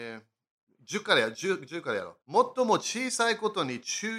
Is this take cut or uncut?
cut